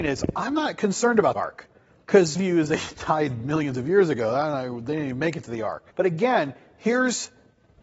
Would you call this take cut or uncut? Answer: cut